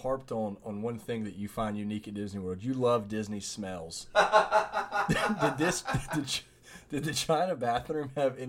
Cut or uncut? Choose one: uncut